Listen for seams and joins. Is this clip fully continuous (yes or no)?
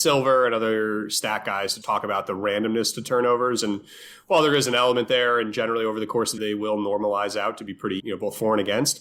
no